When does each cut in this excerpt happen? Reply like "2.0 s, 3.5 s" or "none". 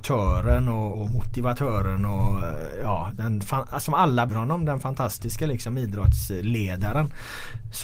0.9 s, 4.3 s